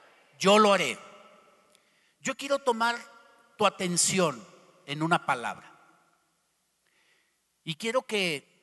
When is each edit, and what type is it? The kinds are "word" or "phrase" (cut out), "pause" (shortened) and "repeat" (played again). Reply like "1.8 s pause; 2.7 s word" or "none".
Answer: none

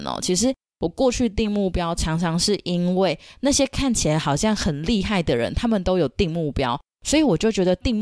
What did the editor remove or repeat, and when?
none

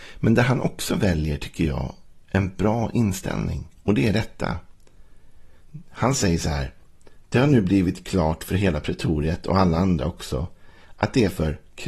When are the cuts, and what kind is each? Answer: 3.8 s pause

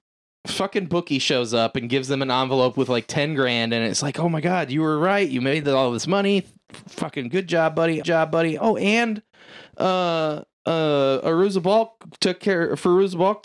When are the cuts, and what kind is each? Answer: 8.0 s repeat; 9.7 s pause

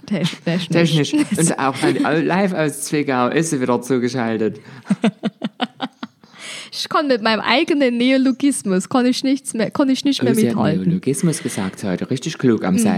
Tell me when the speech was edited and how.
1.5 s phrase; 1.8 s word; 11.8 s word

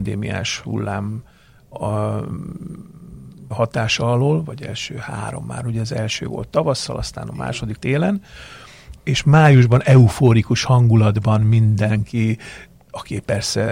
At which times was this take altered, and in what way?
3.5 s word; 7.8 s word; 9.0 s word

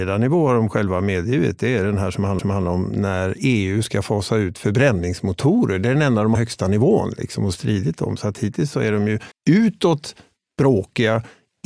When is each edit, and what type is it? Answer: 2.4 s repeat; 6.3 s phrase; 9.3 s pause

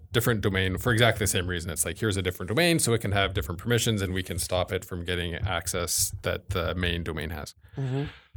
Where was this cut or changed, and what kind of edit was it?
none

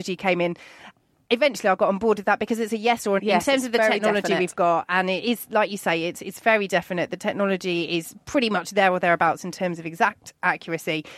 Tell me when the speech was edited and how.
3.2 s phrase

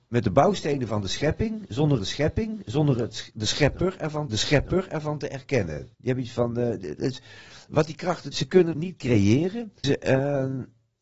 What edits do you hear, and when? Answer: 2.0 s repeat; 4.3 s repeat; 5.9 s pause; 8.3 s word; 8.7 s word; 9.8 s word

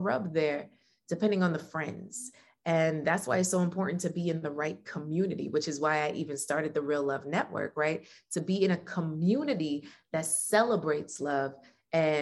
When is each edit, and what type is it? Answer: none

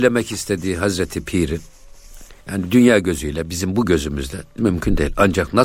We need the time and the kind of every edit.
2.4 s pause; 4.6 s phrase

